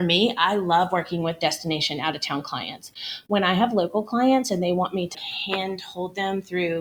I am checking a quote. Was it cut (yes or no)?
yes